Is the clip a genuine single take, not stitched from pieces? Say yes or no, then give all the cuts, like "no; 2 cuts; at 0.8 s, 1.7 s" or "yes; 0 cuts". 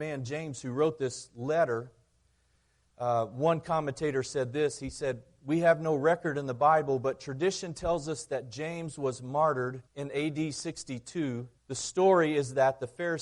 no; 2 cuts; at 9.9 s, 11.6 s